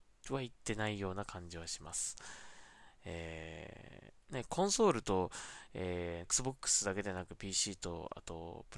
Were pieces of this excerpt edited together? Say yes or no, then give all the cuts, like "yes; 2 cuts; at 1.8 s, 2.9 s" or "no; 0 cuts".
yes; 2 cuts; at 4.2 s, 6.2 s